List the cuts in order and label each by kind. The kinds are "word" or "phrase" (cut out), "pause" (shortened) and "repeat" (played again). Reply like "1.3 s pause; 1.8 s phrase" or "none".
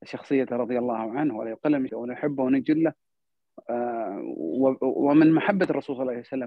1.9 s word